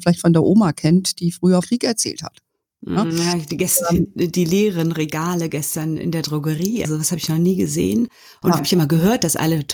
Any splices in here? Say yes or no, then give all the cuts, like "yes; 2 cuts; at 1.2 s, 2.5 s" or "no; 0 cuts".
yes; 3 cuts; at 1.6 s, 6.8 s, 8.6 s